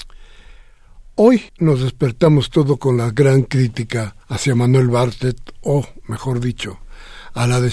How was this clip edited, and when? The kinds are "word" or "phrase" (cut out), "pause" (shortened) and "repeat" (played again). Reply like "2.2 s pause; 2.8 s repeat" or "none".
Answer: 1.5 s pause; 4.2 s pause